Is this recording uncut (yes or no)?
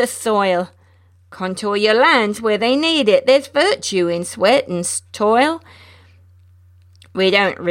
yes